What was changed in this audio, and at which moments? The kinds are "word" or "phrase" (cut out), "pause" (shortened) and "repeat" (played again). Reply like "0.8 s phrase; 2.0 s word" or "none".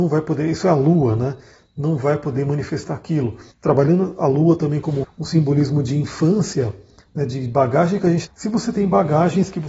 3.5 s pause; 5.0 s word; 8.3 s phrase